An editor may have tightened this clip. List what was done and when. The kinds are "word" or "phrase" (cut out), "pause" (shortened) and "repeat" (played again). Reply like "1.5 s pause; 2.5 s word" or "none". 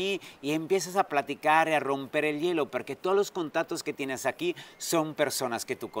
none